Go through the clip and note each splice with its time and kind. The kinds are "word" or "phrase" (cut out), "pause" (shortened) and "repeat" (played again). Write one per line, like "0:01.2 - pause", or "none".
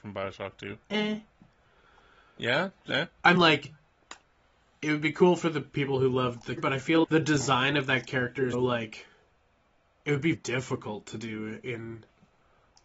0:02.9 - word
0:03.4 - word
0:06.6 - word
0:07.0 - word
0:08.5 - word
0:10.3 - word